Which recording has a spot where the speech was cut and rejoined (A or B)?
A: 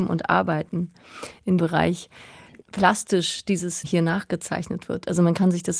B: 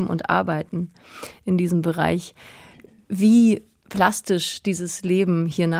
A